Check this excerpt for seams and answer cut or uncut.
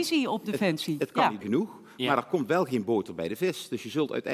cut